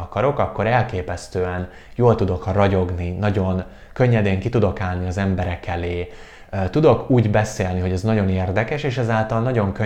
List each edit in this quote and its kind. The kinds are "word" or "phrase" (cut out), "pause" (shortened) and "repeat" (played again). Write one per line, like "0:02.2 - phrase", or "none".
none